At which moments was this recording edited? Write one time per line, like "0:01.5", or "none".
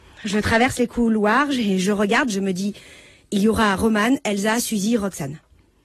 none